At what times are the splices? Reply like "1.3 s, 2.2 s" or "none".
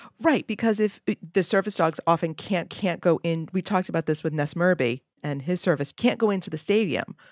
2.7 s, 5.9 s

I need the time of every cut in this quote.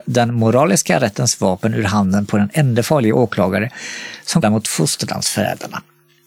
4.4 s

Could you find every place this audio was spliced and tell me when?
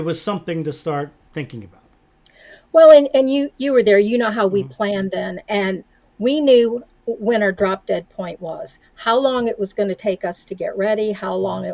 none

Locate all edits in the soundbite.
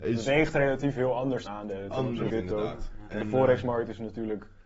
1.5 s, 2.3 s

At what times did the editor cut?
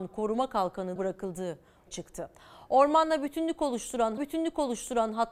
1.0 s, 1.9 s, 4.2 s

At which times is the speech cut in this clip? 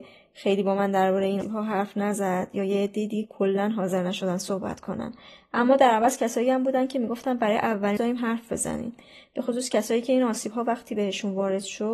1.4 s, 8.0 s

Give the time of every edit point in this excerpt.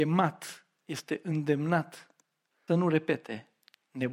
2.7 s

